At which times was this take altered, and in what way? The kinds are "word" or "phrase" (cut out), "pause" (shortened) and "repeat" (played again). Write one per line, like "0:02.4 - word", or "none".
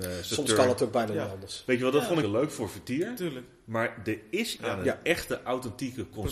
0:02.2 - phrase
0:04.6 - phrase

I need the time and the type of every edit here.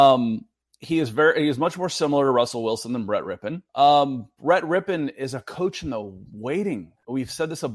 0:03.7 - pause

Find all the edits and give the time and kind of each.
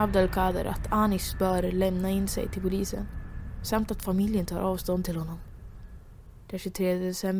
none

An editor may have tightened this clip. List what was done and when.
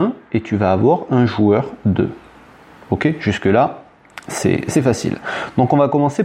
0:04.7 - word

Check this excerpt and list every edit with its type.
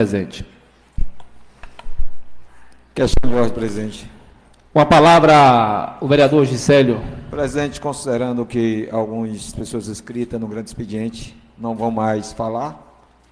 0:09.5 - word

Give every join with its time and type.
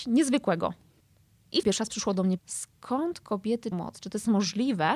0:01.6 - word
0:02.4 - word
0:03.7 - word

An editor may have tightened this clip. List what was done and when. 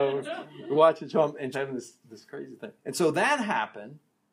0:01.5 - phrase
0:02.0 - word
0:02.8 - pause

